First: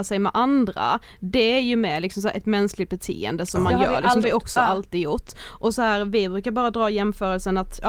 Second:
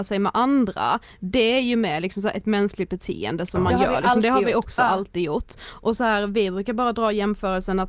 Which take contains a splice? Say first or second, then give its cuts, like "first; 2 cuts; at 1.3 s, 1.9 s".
first; 1 cut; at 4.2 s